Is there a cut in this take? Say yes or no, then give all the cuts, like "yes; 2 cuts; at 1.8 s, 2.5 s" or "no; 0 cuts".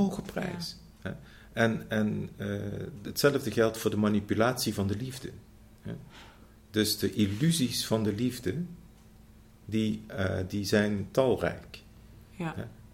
no; 0 cuts